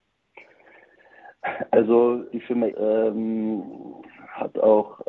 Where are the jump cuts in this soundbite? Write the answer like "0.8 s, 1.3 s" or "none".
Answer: 2.3 s, 2.7 s

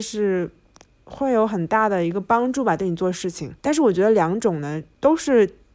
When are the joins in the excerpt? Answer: 3.6 s

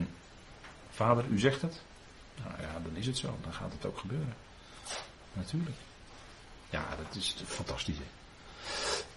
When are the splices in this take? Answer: none

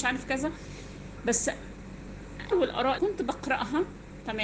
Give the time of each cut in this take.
2.5 s, 3.0 s

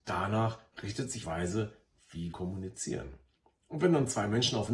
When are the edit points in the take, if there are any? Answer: 1.2 s, 2.3 s

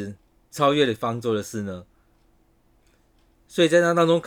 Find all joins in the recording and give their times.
none

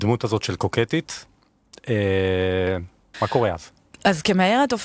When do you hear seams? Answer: 3.1 s

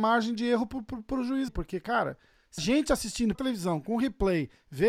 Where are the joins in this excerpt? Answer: 1.5 s, 2.6 s, 3.3 s

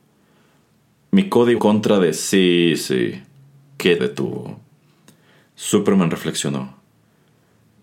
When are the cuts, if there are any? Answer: 1.6 s, 4.0 s

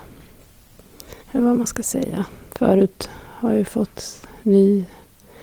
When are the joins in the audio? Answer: 1.2 s

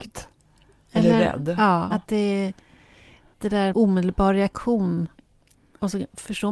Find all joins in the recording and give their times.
1.9 s, 3.3 s, 3.7 s

